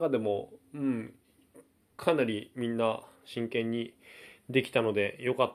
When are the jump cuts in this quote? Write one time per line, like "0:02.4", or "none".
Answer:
none